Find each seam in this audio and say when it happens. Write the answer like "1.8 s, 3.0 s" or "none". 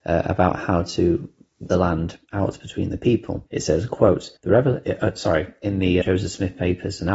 1.7 s, 2.2 s, 3.5 s, 4.4 s, 6.0 s